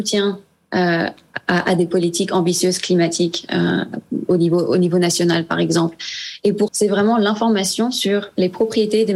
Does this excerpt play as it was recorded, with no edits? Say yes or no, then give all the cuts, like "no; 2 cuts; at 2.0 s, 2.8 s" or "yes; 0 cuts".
no; 1 cut; at 6.7 s